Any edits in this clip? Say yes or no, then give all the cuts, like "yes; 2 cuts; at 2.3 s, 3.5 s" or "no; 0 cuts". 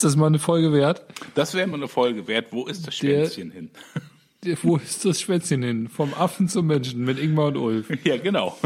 no; 0 cuts